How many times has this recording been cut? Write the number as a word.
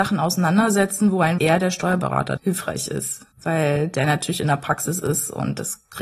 three